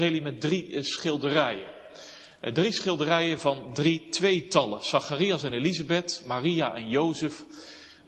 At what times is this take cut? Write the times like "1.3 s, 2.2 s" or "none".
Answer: none